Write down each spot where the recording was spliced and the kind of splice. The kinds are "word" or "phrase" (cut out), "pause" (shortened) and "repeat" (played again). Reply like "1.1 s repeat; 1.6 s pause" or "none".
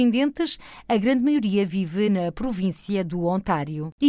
none